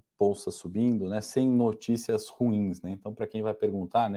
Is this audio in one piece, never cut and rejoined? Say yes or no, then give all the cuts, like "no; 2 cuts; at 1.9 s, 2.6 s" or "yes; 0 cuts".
yes; 0 cuts